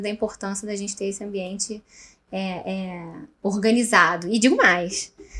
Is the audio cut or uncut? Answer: uncut